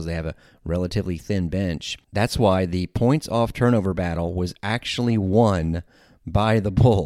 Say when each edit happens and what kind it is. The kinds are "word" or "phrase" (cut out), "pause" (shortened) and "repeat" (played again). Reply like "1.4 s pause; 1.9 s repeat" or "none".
none